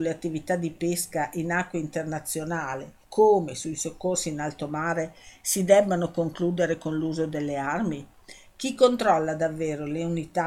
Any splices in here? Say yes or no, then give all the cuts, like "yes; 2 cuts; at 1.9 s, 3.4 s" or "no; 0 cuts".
yes; 1 cut; at 3.0 s